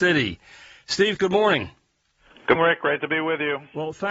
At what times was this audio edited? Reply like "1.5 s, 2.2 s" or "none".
1.2 s, 2.5 s